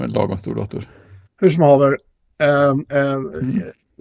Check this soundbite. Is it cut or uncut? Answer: uncut